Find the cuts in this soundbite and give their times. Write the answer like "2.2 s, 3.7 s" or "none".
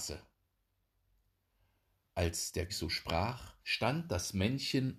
2.7 s, 3.6 s